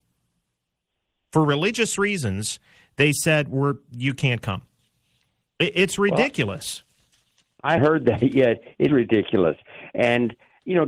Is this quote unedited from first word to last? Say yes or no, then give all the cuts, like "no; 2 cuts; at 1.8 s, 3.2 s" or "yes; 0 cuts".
no; 2 cuts; at 7.8 s, 8.9 s